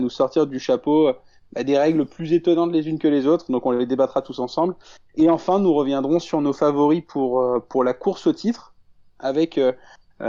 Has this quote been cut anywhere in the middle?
no; 0 cuts

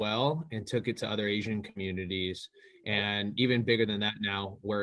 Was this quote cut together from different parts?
no; 0 cuts

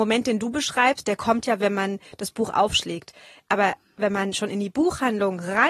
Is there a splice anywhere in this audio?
no; 0 cuts

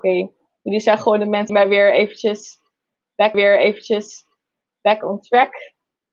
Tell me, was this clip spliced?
yes; 2 cuts; at 1.5 s, 3.3 s

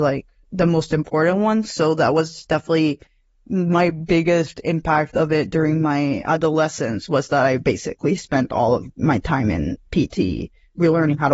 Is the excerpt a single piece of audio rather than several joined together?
yes; 0 cuts

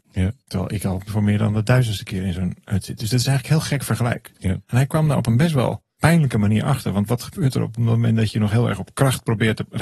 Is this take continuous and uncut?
no; 2 cuts; at 2.6 s, 5.9 s

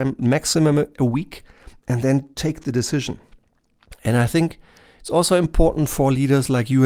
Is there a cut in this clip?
no; 0 cuts

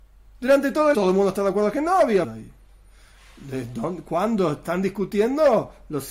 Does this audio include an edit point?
yes; 2 cuts; at 0.9 s, 2.2 s

